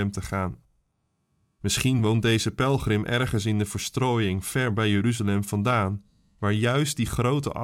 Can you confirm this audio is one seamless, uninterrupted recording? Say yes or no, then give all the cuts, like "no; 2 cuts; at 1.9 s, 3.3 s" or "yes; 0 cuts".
yes; 0 cuts